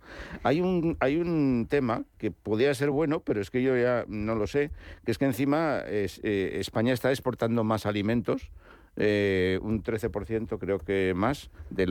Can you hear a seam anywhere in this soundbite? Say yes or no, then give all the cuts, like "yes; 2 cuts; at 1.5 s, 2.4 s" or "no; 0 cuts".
no; 0 cuts